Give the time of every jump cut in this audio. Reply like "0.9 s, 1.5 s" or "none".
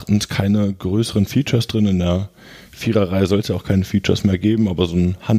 none